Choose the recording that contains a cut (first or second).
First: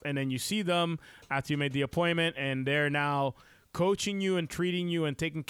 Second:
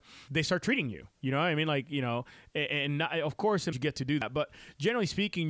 second